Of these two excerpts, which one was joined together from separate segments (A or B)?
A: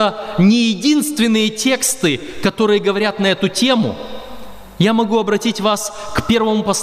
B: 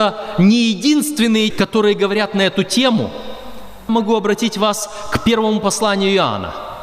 B